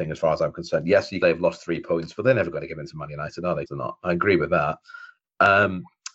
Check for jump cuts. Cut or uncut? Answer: cut